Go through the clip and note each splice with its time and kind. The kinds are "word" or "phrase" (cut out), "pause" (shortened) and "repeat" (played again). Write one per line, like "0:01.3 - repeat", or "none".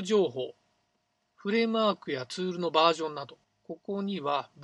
0:03.4 - pause